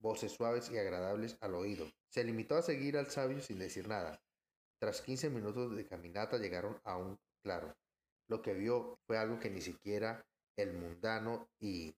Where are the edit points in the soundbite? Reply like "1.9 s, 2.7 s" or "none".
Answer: 2.0 s, 8.0 s, 9.0 s